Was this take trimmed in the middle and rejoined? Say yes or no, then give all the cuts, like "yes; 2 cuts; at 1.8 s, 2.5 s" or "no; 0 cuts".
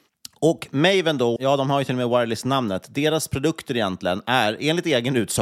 yes; 1 cut; at 1.4 s